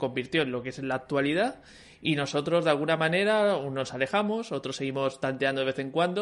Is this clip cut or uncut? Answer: uncut